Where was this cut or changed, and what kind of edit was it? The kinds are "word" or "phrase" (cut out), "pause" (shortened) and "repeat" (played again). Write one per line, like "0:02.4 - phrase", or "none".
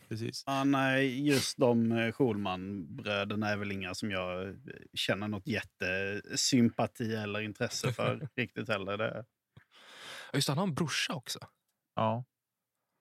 none